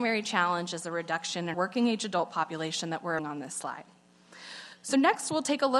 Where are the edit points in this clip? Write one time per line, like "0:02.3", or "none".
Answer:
0:01.5
0:03.2